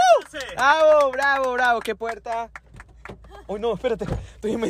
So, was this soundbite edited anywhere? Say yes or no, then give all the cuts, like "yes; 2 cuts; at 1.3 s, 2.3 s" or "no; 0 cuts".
yes; 1 cut; at 2.0 s